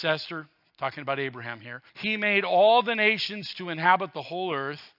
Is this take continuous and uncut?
no; 1 cut; at 1.9 s

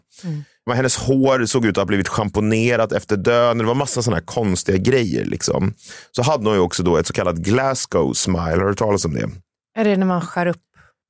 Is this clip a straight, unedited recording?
yes; 0 cuts

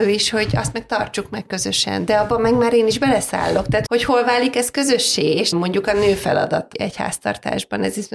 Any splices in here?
yes; 3 cuts; at 3.9 s, 5.5 s, 6.7 s

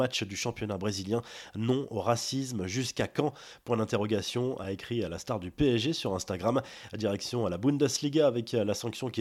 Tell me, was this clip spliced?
no; 0 cuts

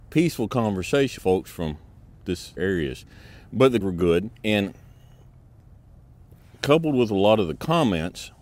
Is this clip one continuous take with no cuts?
no; 4 cuts; at 1.2 s, 2.6 s, 3.8 s, 4.3 s

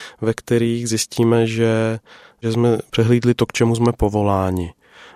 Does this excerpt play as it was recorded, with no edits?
yes; 0 cuts

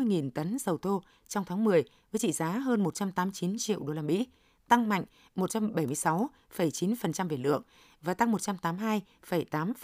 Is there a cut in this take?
no; 0 cuts

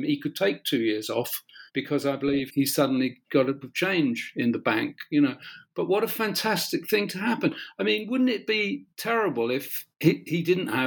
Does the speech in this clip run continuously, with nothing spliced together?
no; 5 cuts; at 1.7 s, 2.5 s, 3.6 s, 8.9 s, 9.9 s

